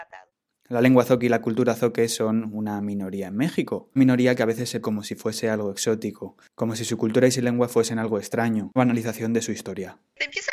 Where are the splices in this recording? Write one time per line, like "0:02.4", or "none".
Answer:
0:04.0
0:04.8
0:08.8